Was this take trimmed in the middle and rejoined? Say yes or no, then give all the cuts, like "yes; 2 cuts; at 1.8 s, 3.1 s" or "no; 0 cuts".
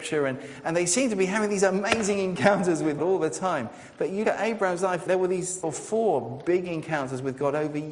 yes; 4 cuts; at 3.0 s, 4.2 s, 5.1 s, 5.6 s